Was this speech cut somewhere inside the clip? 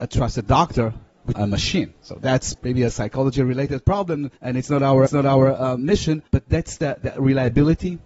yes; 5 cuts; at 1.3 s, 2.6 s, 4.4 s, 5.1 s, 6.3 s

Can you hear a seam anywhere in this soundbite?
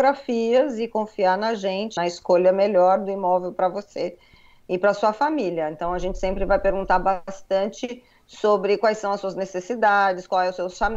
yes; 1 cut; at 2.0 s

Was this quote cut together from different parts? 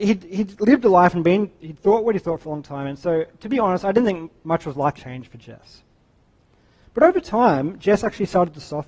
yes; 1 cut; at 5.0 s

